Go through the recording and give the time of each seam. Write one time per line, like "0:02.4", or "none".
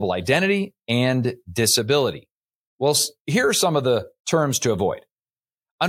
none

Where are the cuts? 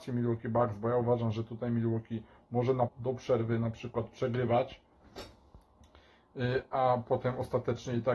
0:02.9

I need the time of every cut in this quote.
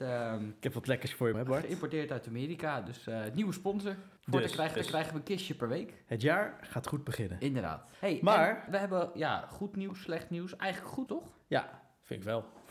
0:01.3
0:04.2
0:04.8
0:07.9
0:08.7
0:11.1

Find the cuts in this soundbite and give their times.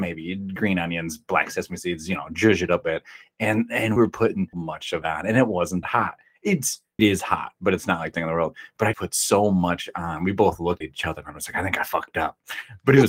0:02.8
0:04.0
0:04.5
0:05.0
0:05.8
0:07.0
0:08.1
0:08.9
0:10.8

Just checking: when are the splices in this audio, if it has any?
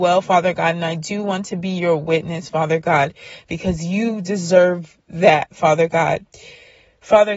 none

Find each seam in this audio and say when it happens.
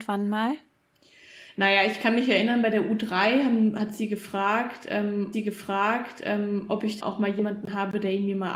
0:05.3
0:07.0

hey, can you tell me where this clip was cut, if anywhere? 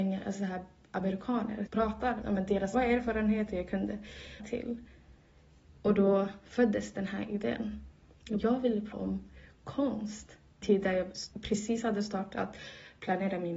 0:01.7
0:02.2
0:02.7
0:04.4
0:08.4
0:08.9
0:10.6
0:11.3

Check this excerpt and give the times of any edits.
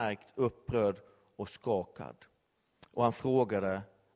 none

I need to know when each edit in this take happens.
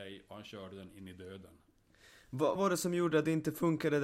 0:02.6

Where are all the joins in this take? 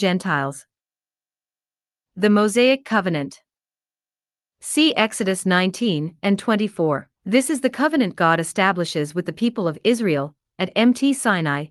0:07.2

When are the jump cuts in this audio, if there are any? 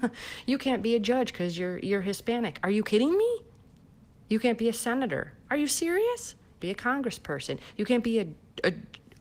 0:06.6

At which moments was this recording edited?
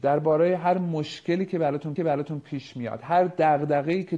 0:02.0

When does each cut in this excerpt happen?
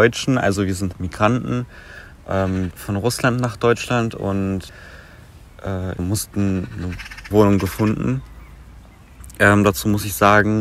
0:00.9
0:02.7
0:06.0
0:07.3

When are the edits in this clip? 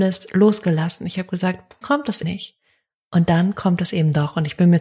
0:01.8
0:02.2

